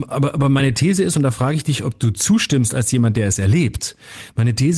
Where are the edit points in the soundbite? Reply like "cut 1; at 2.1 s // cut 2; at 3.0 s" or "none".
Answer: none